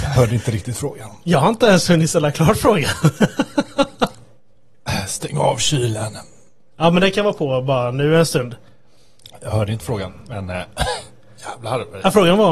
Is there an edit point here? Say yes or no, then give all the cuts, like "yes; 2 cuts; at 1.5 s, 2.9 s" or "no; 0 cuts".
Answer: no; 0 cuts